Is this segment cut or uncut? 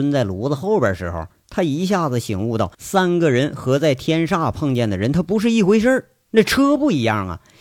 cut